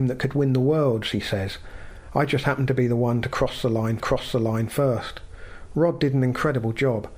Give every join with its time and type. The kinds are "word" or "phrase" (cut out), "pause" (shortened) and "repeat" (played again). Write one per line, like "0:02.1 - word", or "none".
0:04.0 - repeat